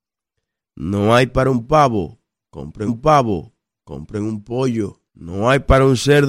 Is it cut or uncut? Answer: cut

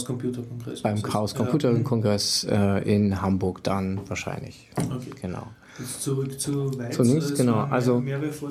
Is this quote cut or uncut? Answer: uncut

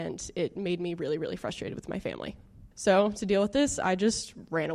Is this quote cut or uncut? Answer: cut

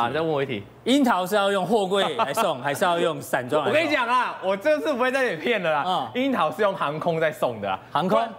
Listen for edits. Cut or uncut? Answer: uncut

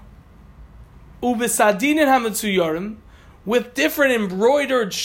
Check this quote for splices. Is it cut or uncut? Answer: uncut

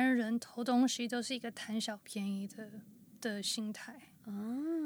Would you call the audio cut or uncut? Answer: uncut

